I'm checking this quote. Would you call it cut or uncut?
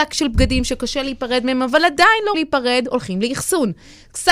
cut